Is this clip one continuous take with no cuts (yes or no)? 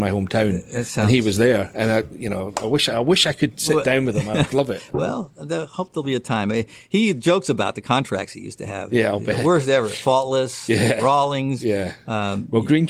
yes